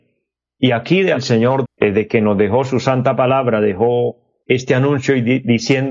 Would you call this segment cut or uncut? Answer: cut